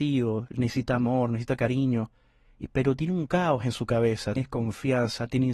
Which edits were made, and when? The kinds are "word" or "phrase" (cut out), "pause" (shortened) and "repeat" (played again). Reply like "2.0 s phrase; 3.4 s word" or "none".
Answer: 4.4 s word